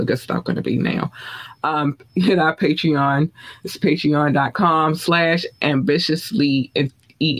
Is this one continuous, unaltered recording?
yes; 0 cuts

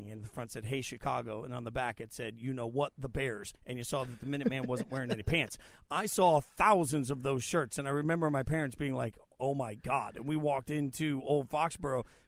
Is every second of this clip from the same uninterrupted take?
no; 1 cut; at 3.5 s

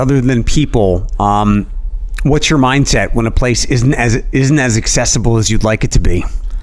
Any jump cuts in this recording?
no; 0 cuts

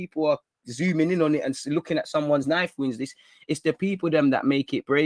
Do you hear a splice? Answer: no; 0 cuts

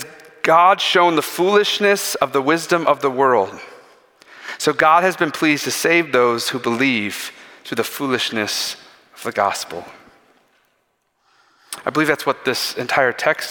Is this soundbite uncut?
yes; 0 cuts

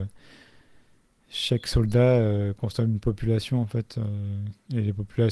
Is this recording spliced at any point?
no; 0 cuts

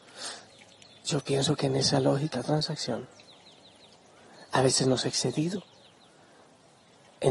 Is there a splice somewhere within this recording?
yes; 2 cuts; at 2.3 s, 5.0 s

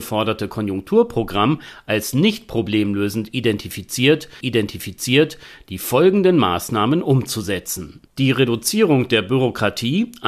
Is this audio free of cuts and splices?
no; 1 cut; at 4.4 s

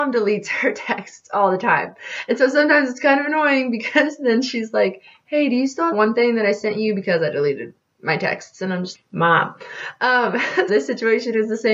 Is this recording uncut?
no; 3 cuts; at 5.9 s, 8.9 s, 10.7 s

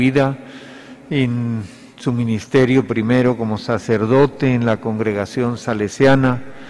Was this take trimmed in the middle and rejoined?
no; 0 cuts

